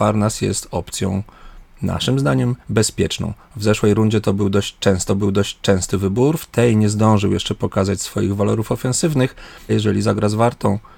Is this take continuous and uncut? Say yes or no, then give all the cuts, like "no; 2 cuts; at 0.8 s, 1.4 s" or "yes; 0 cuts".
no; 3 cuts; at 2.6 s, 5.1 s, 9.7 s